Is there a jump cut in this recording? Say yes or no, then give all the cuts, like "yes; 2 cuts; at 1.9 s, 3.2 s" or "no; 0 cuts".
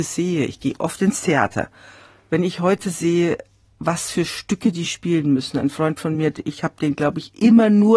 no; 0 cuts